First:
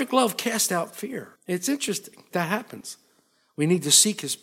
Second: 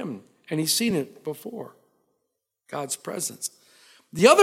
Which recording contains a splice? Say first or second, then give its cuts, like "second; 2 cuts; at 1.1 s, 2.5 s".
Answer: first; 2 cuts; at 1.4 s, 2.3 s